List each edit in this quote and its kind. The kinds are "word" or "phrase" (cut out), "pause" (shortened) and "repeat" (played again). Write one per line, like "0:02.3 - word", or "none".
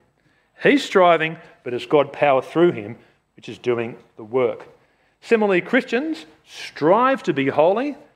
none